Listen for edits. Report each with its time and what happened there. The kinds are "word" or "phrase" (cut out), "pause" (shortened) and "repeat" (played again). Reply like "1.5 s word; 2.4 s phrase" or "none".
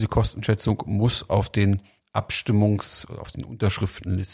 none